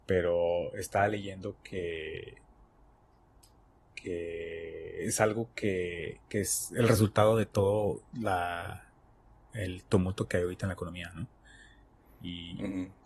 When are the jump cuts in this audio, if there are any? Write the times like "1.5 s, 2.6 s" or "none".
none